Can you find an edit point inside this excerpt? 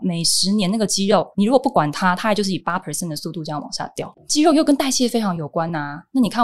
yes; 1 cut; at 1.3 s

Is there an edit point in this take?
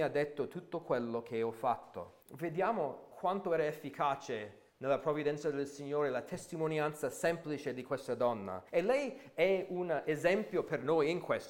yes; 3 cuts; at 2.2 s, 4.7 s, 8.7 s

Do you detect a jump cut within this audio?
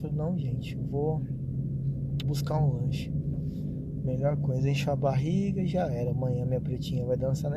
yes; 1 cut; at 2.2 s

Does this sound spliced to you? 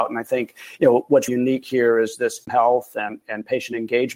yes; 2 cuts; at 1.3 s, 2.4 s

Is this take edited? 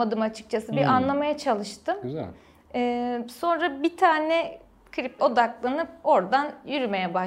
yes; 1 cut; at 5.2 s

